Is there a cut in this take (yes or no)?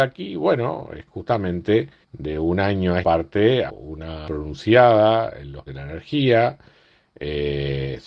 yes